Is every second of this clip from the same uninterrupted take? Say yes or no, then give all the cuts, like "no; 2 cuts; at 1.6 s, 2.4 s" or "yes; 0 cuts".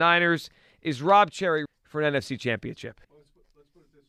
no; 2 cuts; at 1.7 s, 3.0 s